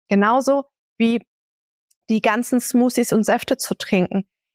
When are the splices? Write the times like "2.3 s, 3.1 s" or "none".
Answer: none